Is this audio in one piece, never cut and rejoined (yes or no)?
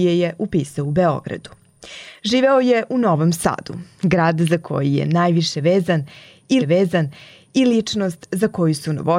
no